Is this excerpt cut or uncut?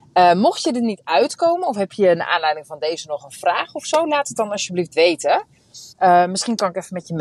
cut